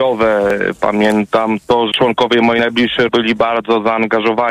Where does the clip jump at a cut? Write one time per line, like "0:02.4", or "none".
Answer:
0:01.9
0:03.1

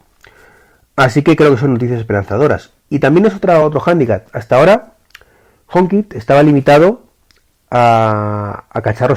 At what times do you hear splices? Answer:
none

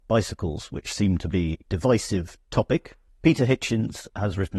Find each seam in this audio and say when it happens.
0:01.6
0:03.1

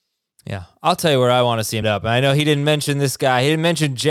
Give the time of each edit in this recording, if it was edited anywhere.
0:01.8

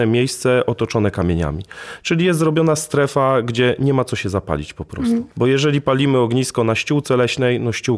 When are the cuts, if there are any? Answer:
0:05.3

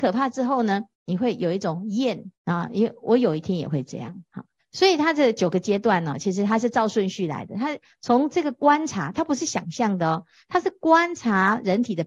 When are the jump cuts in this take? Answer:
0:00.9
0:02.3
0:04.6

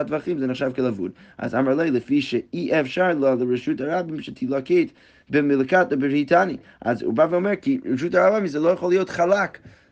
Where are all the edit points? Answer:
none

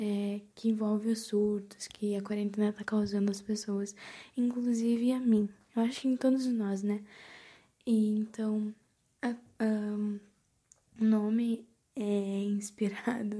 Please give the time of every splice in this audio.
none

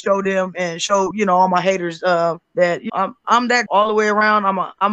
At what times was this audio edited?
0:02.4
0:02.9
0:03.2
0:03.7

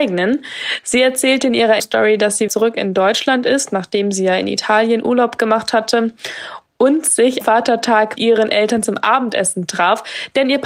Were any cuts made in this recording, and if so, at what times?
0:01.8
0:02.5
0:07.4
0:08.2

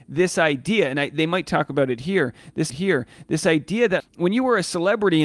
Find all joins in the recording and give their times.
0:02.7
0:04.0

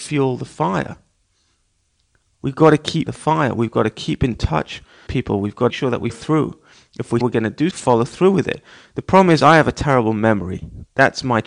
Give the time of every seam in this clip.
0:03.1
0:05.1
0:05.7
0:06.1
0:07.2
0:07.7

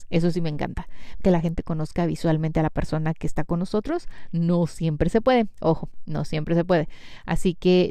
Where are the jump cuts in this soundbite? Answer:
0:01.2

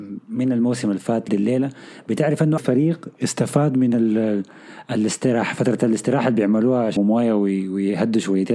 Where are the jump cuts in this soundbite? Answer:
0:01.3
0:02.6
0:07.0

